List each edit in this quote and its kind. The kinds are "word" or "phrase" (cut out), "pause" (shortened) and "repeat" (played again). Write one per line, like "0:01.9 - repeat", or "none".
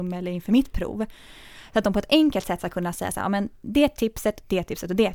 none